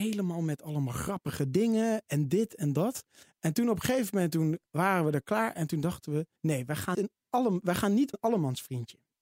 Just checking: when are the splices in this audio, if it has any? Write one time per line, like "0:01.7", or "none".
0:04.7
0:06.4
0:06.9
0:08.1